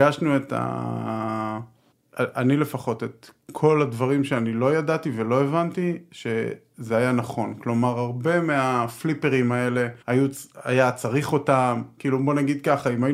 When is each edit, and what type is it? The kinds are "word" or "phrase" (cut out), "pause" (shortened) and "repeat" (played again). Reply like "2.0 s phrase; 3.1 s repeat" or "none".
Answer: 1.9 s pause; 10.0 s pause